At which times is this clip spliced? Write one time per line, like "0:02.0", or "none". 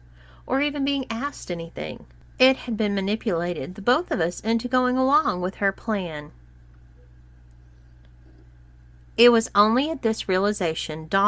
none

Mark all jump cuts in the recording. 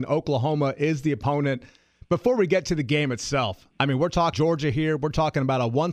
0:04.3

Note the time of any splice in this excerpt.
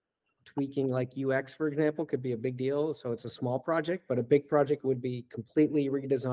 none

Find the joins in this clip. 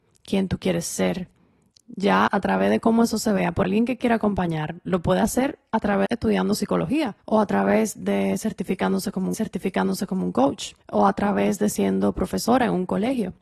0:02.3
0:03.6
0:06.1
0:07.2
0:09.3
0:10.8

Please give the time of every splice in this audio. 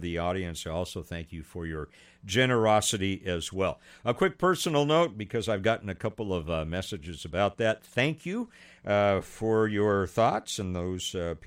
none

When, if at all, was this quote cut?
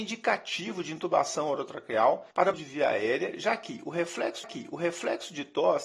0:02.5
0:04.4

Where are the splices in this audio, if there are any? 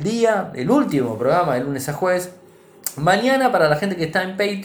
none

